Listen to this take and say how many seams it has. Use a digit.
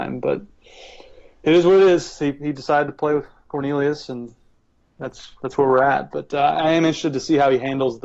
0